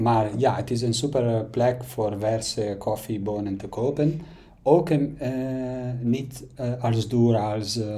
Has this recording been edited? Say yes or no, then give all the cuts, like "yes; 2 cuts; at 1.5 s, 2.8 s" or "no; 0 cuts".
no; 0 cuts